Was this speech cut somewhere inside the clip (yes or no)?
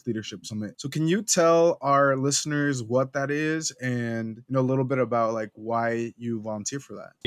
no